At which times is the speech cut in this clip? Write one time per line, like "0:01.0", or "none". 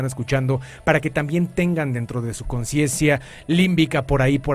none